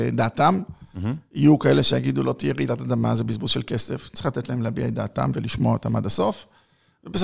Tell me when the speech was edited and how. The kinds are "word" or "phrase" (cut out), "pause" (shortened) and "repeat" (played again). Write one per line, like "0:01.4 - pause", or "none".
none